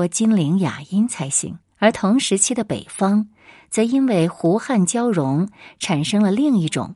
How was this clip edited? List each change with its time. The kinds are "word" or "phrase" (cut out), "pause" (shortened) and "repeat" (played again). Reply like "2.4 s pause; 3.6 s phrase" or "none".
1.6 s pause